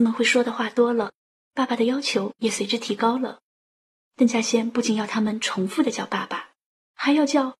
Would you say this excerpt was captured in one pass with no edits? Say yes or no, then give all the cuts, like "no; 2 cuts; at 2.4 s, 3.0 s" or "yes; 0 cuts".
yes; 0 cuts